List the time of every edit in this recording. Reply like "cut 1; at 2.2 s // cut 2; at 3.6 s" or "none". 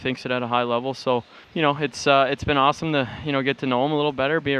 cut 1; at 1.4 s

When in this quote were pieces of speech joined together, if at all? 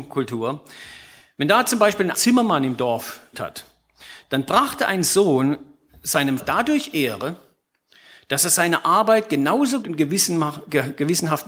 cut 1; at 2.1 s // cut 2; at 3.3 s // cut 3; at 6.4 s // cut 4; at 9.8 s

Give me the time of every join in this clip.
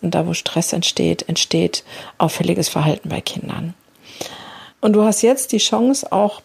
cut 1; at 4.7 s

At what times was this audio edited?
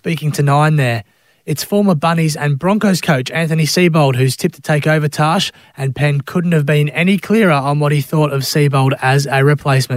none

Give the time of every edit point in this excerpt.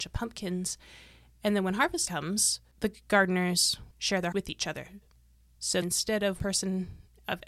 cut 1; at 2.1 s // cut 2; at 3.9 s // cut 3; at 4.3 s // cut 4; at 5.8 s // cut 5; at 6.4 s

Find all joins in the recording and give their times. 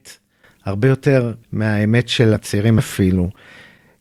cut 1; at 1.4 s // cut 2; at 2.3 s // cut 3; at 2.8 s

